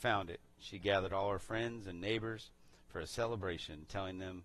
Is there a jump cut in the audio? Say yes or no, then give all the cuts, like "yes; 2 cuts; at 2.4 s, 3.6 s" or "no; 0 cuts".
no; 0 cuts